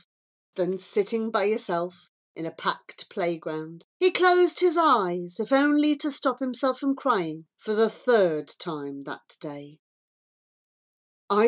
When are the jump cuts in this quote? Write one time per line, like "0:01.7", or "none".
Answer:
0:03.9